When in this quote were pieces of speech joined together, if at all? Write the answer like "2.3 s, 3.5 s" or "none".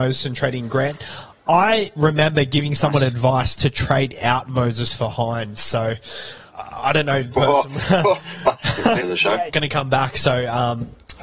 6.5 s, 7.3 s, 9.0 s, 9.5 s